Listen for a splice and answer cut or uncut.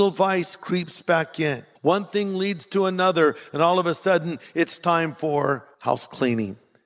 cut